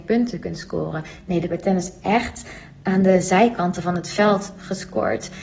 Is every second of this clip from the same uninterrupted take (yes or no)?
no